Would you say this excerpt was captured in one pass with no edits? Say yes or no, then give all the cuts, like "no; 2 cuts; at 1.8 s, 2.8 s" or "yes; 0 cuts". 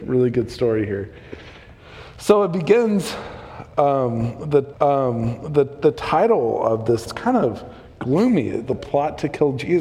no; 3 cuts; at 4.7 s, 7.1 s, 8.7 s